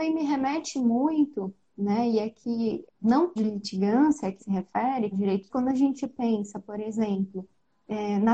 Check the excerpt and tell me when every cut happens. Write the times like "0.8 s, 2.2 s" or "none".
2.9 s, 3.4 s, 4.4 s, 5.1 s, 5.5 s